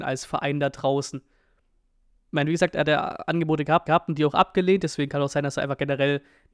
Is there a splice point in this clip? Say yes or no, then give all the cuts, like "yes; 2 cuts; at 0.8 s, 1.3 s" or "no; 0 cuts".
yes; 1 cut; at 3.9 s